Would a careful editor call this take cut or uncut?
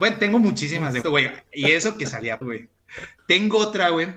cut